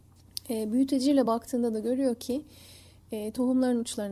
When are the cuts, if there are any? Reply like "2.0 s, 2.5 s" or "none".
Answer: none